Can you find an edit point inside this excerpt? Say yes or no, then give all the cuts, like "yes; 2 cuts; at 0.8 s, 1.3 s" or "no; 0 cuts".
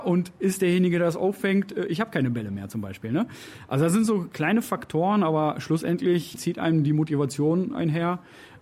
no; 0 cuts